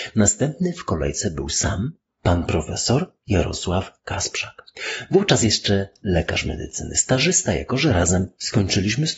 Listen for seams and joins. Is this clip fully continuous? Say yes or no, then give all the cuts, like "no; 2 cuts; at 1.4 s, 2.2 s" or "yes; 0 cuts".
yes; 0 cuts